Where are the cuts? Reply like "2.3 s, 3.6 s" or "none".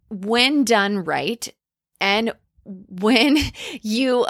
none